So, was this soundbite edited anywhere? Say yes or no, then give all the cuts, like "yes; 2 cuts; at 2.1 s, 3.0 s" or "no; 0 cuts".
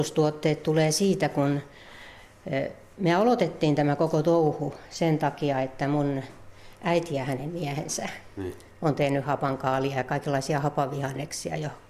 no; 0 cuts